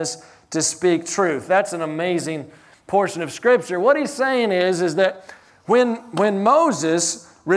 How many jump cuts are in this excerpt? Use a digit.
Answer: 0